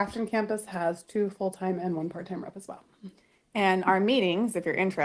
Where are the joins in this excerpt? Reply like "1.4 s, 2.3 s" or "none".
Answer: none